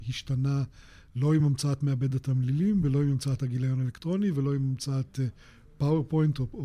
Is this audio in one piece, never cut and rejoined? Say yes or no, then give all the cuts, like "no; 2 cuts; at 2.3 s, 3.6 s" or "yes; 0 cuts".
yes; 0 cuts